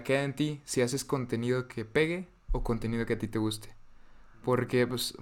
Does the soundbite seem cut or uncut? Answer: uncut